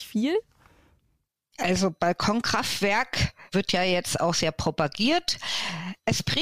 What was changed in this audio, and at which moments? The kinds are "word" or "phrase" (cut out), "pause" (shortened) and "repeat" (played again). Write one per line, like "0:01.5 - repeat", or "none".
none